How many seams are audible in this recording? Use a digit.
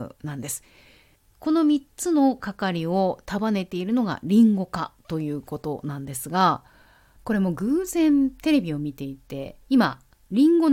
1